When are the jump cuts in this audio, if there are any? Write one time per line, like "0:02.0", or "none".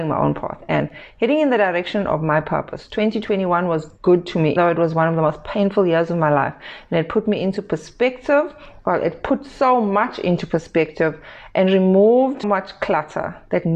0:04.6
0:12.4